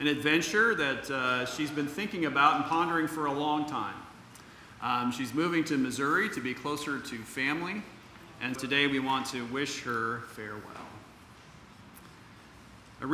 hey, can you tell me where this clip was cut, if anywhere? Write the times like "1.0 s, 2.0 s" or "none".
8.6 s